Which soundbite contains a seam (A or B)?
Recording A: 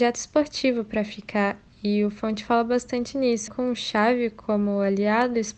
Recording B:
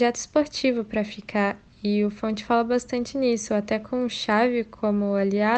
A